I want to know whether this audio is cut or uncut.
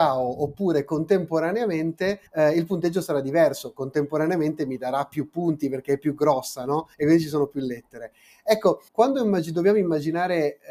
cut